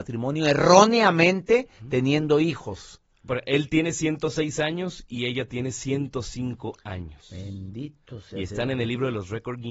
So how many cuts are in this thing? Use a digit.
0